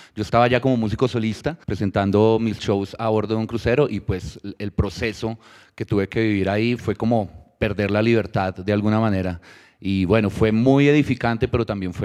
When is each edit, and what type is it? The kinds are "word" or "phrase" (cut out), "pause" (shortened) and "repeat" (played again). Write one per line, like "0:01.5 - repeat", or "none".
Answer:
0:01.6 - pause